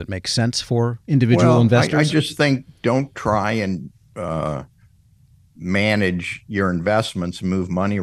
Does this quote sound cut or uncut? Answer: uncut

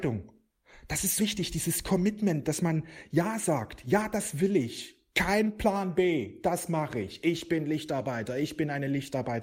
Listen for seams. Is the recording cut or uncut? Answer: cut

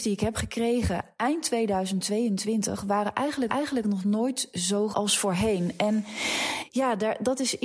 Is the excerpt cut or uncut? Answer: cut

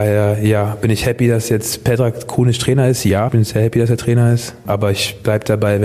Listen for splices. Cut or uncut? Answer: cut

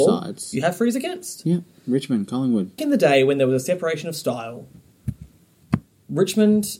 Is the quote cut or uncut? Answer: cut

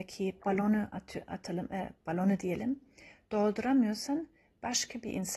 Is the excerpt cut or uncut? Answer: uncut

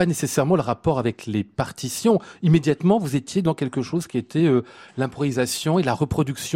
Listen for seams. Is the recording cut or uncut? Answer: uncut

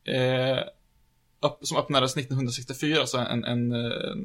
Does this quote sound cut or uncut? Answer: uncut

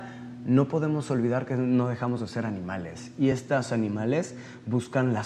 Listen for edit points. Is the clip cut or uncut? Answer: uncut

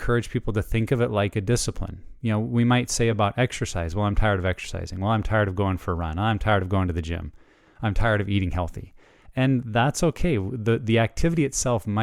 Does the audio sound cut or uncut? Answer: uncut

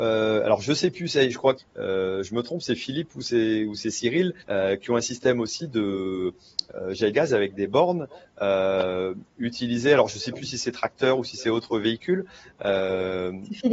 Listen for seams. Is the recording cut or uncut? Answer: cut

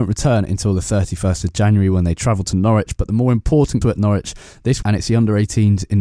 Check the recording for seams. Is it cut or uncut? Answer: cut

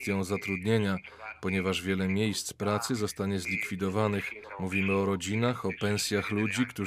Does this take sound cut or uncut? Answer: uncut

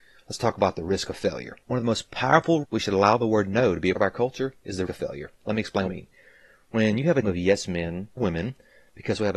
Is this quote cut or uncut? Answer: cut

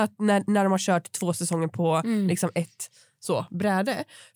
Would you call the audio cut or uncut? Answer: uncut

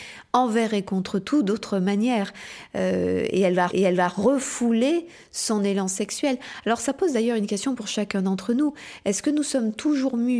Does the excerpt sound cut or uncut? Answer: cut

